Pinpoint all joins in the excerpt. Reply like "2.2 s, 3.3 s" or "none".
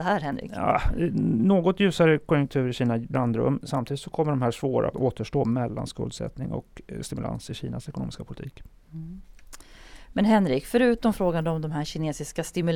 3.1 s, 4.9 s